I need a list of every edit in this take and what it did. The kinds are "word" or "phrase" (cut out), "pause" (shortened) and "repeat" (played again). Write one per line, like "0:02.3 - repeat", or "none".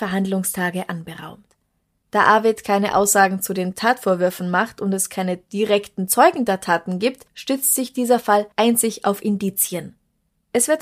none